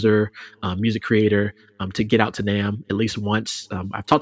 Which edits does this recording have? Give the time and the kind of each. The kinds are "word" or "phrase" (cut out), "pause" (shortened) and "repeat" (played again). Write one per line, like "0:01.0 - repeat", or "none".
none